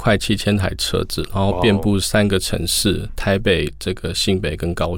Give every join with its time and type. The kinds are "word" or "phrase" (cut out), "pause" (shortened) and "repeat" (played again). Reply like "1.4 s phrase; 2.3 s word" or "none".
3.1 s word